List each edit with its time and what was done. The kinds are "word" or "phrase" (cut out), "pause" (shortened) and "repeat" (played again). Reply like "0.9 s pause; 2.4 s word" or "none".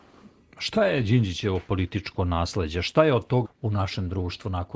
3.5 s word